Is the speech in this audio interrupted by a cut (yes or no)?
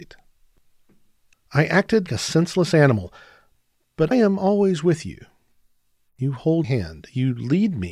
yes